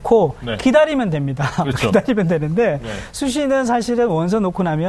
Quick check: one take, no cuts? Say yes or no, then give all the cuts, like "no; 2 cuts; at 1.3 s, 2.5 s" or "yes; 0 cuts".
yes; 0 cuts